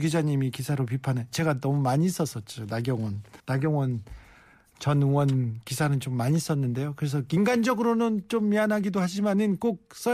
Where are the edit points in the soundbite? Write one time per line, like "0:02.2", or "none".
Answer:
0:03.4